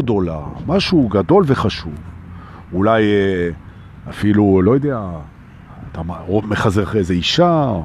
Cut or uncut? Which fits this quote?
uncut